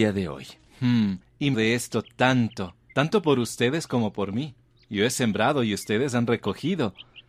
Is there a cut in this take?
yes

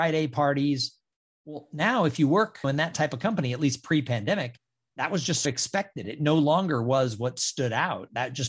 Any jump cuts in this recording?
no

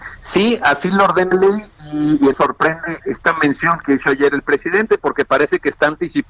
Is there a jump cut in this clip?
yes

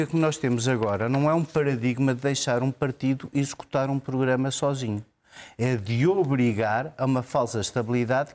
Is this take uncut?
yes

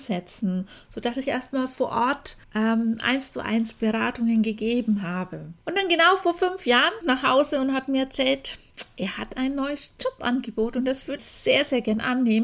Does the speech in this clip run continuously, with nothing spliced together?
no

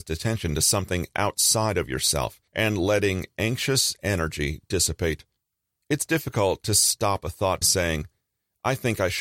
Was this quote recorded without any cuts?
no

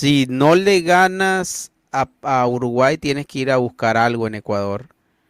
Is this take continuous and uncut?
yes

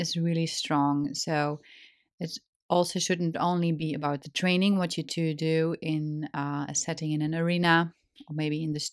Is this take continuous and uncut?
yes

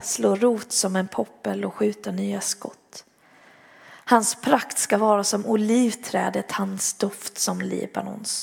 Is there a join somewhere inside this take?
no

